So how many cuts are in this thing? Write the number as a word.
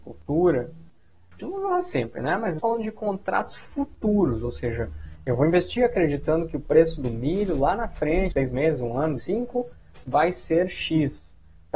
five